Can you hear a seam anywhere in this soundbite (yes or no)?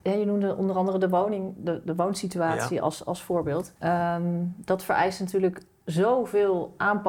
yes